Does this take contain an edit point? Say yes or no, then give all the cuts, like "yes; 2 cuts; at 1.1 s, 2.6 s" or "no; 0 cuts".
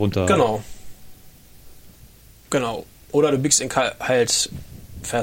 no; 0 cuts